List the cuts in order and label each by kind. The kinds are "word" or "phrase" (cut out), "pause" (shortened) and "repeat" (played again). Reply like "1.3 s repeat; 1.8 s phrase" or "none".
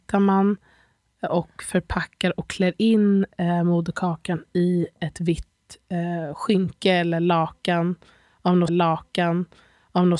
8.7 s repeat